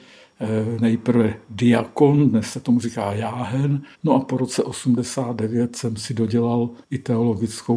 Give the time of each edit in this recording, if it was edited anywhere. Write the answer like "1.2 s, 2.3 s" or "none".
3.9 s, 6.8 s